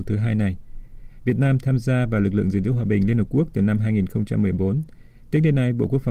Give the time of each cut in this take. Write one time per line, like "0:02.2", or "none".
none